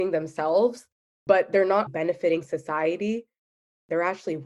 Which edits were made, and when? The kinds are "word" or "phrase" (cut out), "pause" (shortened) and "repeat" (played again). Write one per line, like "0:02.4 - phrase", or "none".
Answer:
0:01.9 - word